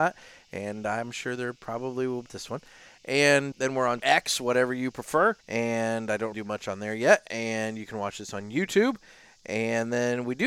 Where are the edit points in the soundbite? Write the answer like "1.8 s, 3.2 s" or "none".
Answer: 2.3 s, 3.5 s, 4.0 s, 5.4 s, 6.3 s